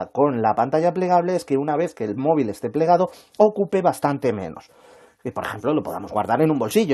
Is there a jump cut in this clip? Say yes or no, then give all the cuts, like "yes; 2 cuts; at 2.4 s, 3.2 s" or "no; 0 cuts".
no; 0 cuts